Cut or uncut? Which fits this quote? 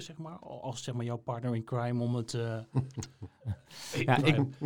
uncut